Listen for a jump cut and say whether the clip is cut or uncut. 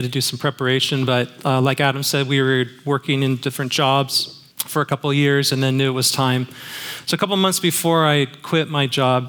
cut